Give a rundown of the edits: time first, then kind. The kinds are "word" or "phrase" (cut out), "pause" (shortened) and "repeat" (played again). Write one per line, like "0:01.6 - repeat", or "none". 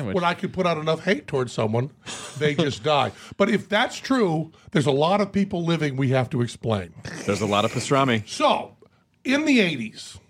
none